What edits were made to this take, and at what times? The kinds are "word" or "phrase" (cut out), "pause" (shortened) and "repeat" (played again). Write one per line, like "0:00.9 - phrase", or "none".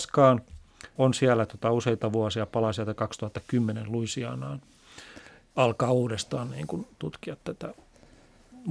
0:01.0 - word